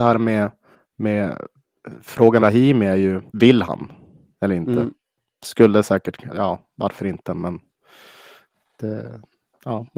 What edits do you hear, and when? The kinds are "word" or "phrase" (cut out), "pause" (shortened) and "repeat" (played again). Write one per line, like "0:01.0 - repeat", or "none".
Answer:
0:02.4 - word
0:03.3 - pause
0:06.3 - word